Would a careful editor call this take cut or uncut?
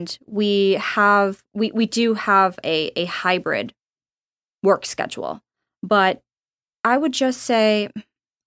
uncut